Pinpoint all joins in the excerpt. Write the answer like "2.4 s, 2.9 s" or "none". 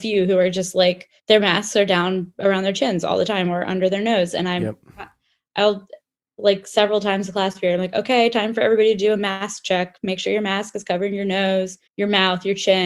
1.2 s, 11.9 s

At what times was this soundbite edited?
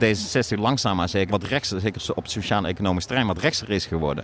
1.3 s

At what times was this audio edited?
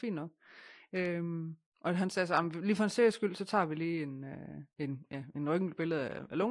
4.7 s

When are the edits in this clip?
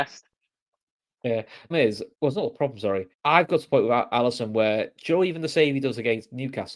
1.7 s, 2.1 s, 3.1 s

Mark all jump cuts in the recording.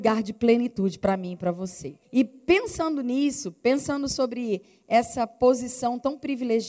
2.0 s

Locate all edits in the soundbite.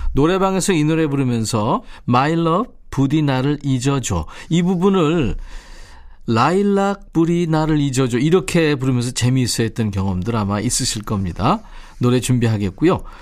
none

